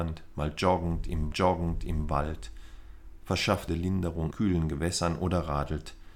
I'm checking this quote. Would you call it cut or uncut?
cut